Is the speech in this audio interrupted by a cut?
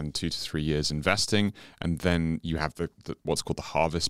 no; 0 cuts

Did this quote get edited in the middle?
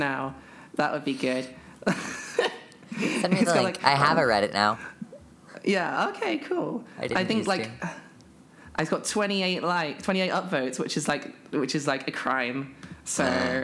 no; 0 cuts

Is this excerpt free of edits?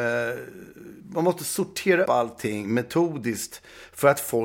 no; 2 cuts; at 1.0 s, 2.1 s

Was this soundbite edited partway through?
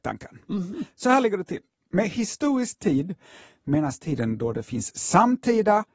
no; 0 cuts

